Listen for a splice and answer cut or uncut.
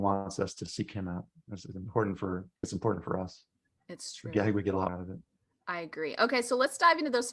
cut